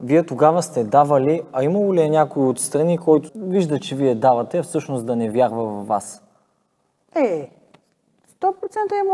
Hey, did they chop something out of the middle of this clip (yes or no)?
yes